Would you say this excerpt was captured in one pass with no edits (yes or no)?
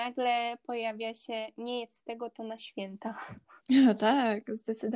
no